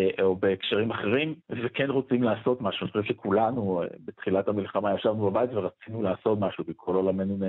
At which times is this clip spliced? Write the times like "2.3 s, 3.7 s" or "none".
1.4 s